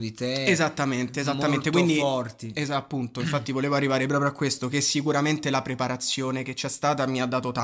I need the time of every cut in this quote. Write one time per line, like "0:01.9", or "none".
none